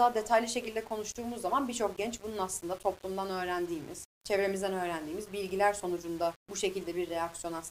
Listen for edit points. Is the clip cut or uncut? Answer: cut